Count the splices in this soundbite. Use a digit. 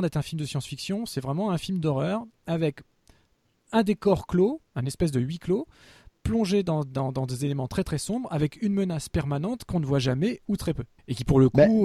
0